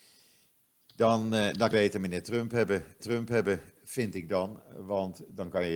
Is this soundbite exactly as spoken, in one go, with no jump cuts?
no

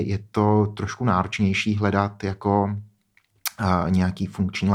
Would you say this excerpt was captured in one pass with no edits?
yes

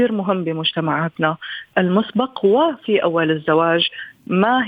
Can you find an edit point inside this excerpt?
yes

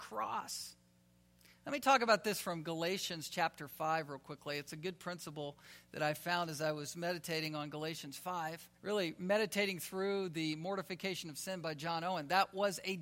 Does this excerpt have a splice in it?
yes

